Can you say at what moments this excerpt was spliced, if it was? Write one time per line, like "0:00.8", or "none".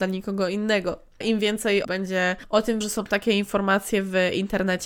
0:01.2
0:01.8
0:02.8